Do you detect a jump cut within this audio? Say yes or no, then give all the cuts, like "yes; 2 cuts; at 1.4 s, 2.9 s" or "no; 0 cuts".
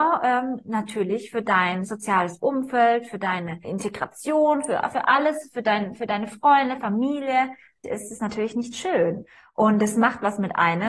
no; 0 cuts